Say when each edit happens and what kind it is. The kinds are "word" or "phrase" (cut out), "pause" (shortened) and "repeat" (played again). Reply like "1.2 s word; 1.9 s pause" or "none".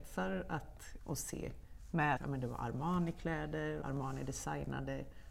1.0 s word; 2.2 s word; 3.8 s word